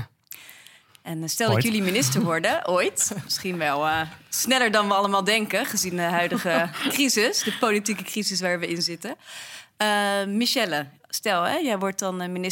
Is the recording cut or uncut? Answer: uncut